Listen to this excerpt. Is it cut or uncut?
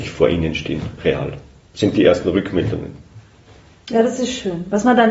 uncut